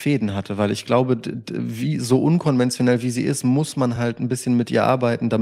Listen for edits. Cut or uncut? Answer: uncut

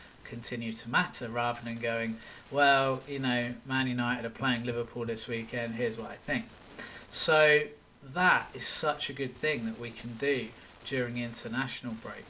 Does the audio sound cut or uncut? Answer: uncut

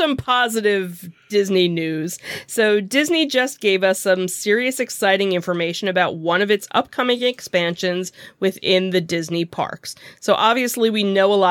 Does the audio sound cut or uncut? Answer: uncut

